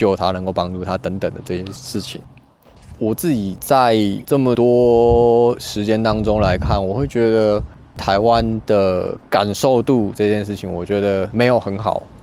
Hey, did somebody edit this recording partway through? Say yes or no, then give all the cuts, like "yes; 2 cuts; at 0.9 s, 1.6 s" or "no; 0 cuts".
yes; 1 cut; at 10.1 s